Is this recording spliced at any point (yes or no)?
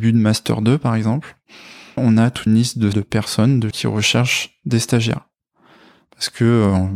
yes